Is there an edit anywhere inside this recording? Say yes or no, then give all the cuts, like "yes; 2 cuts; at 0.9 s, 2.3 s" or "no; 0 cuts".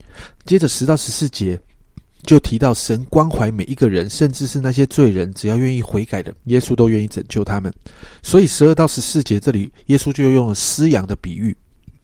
yes; 1 cut; at 6.4 s